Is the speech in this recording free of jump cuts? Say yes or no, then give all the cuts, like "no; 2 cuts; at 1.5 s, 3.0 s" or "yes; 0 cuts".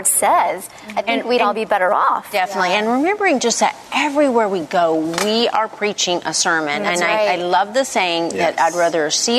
yes; 0 cuts